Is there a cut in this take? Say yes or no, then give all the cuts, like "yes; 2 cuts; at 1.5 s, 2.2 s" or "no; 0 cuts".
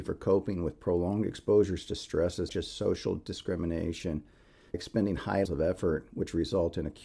yes; 3 cuts; at 2.5 s, 4.7 s, 5.5 s